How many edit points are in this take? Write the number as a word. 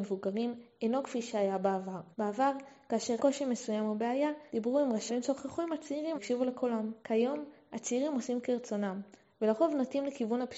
six